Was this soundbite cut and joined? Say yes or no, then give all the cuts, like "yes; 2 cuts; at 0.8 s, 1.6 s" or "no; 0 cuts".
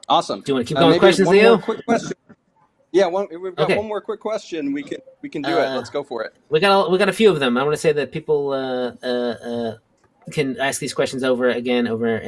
no; 0 cuts